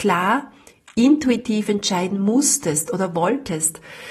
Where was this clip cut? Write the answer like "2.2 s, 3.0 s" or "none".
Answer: none